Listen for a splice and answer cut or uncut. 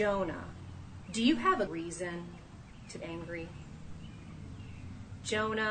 cut